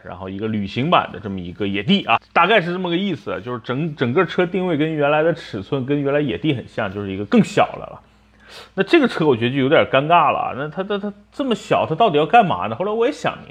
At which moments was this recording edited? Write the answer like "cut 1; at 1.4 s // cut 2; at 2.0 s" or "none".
cut 1; at 2.2 s